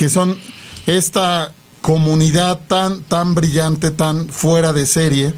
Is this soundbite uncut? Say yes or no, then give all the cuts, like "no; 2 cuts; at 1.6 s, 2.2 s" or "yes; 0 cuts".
yes; 0 cuts